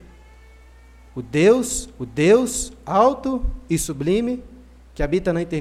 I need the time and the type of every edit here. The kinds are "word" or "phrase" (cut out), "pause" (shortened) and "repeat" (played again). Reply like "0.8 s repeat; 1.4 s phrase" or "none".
2.0 s repeat